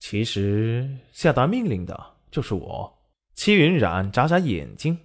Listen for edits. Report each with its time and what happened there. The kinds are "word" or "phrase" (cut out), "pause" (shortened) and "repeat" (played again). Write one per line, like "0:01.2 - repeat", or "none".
0:03.1 - pause